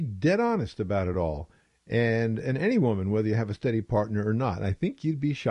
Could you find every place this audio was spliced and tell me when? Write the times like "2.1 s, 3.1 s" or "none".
none